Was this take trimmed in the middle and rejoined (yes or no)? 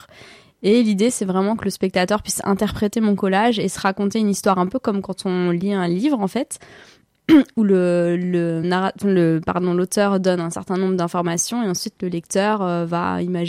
no